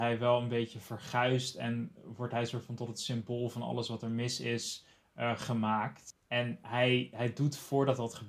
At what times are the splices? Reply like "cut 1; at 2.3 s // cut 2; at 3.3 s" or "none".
none